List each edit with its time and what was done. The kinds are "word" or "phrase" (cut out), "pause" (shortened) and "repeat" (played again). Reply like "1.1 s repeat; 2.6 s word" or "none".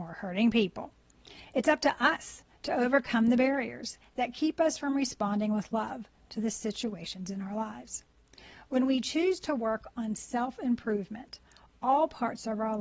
none

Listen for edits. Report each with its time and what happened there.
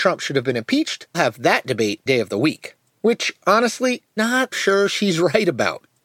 1.1 s word; 2.1 s word; 4.2 s word; 4.5 s word

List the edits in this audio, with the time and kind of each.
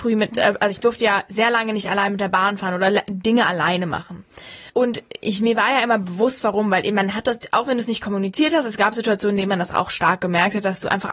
4.7 s pause; 9.7 s word

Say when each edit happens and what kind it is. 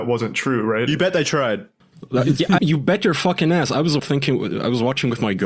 2.6 s word; 4.0 s phrase

